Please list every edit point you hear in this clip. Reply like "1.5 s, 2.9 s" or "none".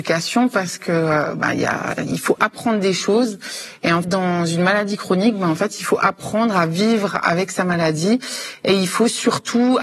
4.0 s